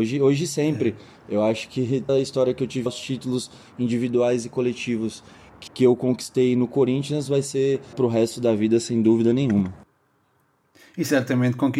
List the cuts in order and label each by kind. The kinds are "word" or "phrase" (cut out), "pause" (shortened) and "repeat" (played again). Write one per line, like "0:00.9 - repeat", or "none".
0:02.1 - word
0:02.9 - word
0:05.7 - word
0:07.9 - word